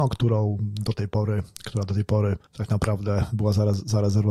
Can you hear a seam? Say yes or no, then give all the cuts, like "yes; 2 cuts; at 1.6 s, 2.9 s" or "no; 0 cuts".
no; 0 cuts